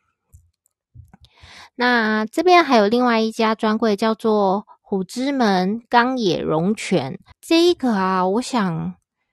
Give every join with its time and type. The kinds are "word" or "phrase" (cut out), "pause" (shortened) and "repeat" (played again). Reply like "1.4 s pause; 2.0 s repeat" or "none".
7.3 s pause